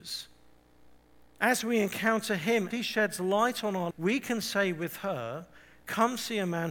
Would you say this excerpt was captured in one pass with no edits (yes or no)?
no